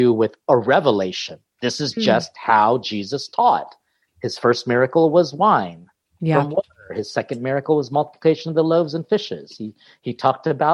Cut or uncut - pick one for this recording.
uncut